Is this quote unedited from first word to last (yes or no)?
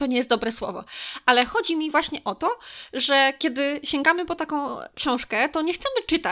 yes